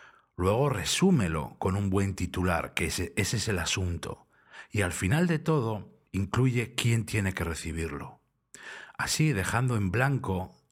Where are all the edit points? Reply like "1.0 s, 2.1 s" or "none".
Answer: 6.1 s